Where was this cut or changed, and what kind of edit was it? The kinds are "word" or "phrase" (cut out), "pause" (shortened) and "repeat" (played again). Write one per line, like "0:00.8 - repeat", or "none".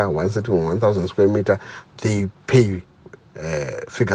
0:03.2 - word